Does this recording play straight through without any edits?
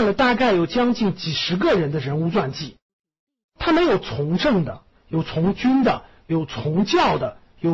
yes; 0 cuts

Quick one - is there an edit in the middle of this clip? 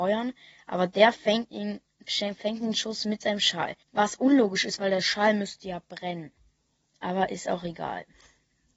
yes; 2 cuts; at 3.8 s, 6.6 s

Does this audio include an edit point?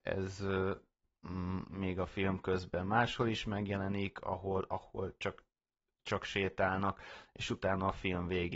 no; 0 cuts

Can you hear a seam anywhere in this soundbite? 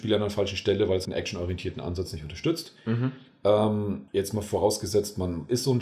yes; 2 cuts; at 1.0 s, 4.1 s

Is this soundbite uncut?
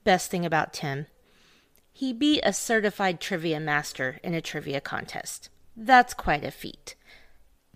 yes; 0 cuts

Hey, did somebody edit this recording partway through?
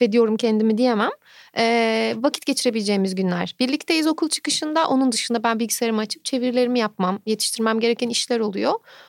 no; 0 cuts

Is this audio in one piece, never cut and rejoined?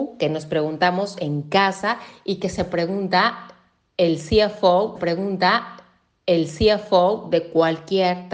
no; 1 cut; at 4.9 s

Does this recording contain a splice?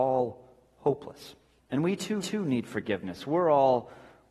yes; 2 cuts; at 1.6 s, 2.2 s

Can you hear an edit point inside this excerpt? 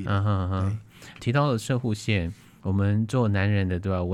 yes; 1 cut; at 1.2 s

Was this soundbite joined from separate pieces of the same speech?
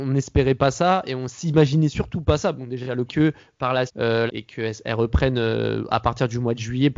yes; 3 cuts; at 3.1 s, 3.9 s, 4.3 s

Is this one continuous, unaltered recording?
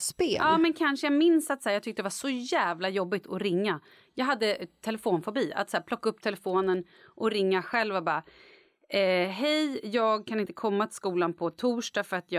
yes; 0 cuts

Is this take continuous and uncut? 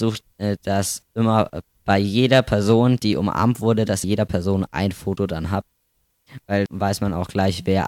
no; 3 cuts; at 1.8 s, 4.0 s, 6.7 s

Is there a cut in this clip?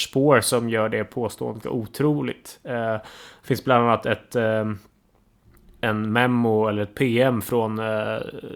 yes; 1 cut; at 1.6 s

